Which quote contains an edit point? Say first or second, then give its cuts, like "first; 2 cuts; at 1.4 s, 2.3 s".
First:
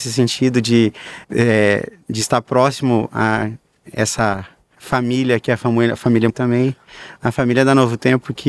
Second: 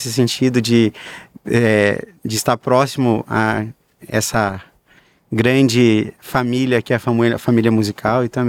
first; 3 cuts; at 1.2 s, 4.7 s, 6.3 s